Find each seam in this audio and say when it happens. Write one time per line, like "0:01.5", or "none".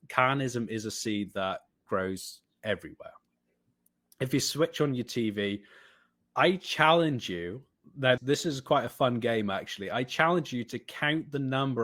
0:08.2